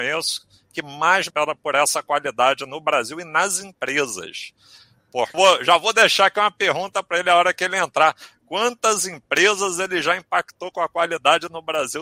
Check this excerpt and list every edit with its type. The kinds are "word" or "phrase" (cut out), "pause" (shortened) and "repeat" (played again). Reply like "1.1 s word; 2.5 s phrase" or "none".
1.3 s word; 5.3 s word